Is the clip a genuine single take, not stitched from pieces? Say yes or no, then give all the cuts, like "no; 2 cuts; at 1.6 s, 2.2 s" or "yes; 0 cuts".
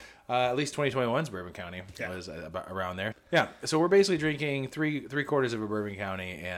no; 1 cut; at 3.1 s